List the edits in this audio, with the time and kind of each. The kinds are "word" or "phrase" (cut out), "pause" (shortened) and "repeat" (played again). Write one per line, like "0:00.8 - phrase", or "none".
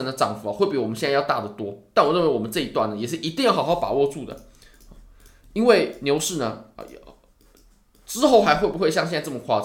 none